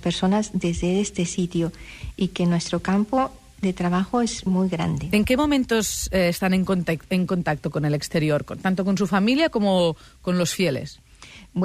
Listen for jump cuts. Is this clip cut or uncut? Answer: cut